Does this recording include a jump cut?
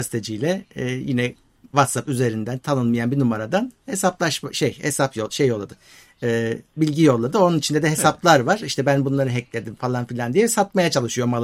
no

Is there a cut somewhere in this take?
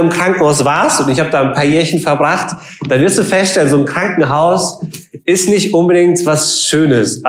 no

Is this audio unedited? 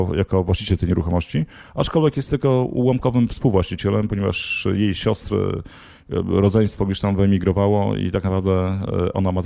yes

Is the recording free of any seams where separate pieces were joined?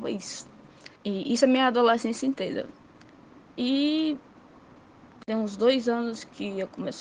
no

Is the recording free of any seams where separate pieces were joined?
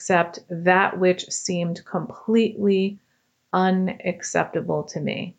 yes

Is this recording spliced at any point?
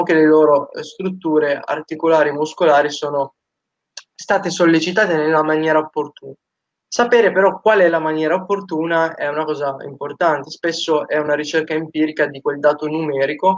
no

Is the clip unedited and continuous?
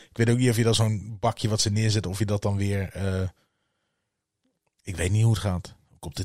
yes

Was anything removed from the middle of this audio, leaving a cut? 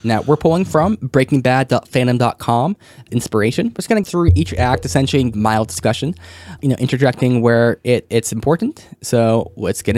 yes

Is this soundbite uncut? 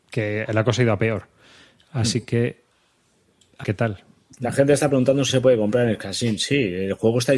no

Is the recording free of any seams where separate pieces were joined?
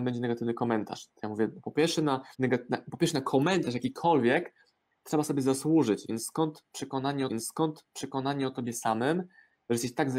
no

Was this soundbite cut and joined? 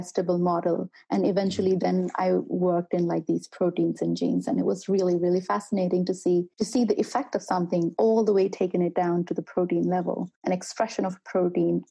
yes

